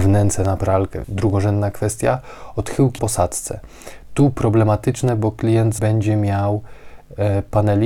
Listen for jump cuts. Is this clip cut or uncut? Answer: cut